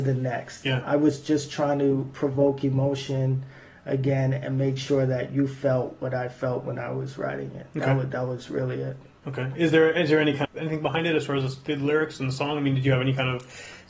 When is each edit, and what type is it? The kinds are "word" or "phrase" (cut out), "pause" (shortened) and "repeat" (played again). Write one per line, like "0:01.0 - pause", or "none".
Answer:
0:10.4 - phrase